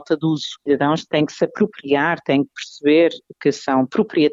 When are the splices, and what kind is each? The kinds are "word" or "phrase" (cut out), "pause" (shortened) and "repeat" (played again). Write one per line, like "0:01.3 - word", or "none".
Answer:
none